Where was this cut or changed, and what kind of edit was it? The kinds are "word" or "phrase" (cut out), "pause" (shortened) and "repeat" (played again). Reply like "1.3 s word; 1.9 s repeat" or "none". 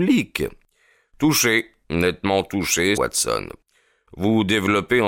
1.8 s pause; 3.0 s word